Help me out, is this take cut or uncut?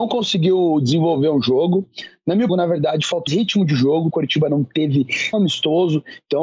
cut